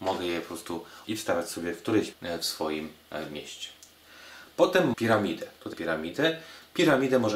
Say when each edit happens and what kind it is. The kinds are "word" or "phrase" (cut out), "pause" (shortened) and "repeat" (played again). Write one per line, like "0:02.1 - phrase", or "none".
0:01.0 - word
0:02.1 - word
0:04.9 - word
0:05.7 - word